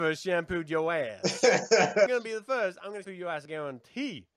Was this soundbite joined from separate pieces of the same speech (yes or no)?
yes